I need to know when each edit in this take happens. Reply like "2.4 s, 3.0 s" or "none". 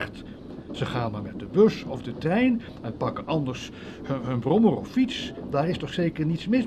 none